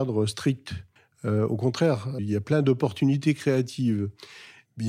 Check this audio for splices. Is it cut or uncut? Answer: cut